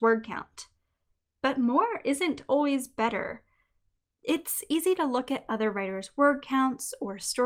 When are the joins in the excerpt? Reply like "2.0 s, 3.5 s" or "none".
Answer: none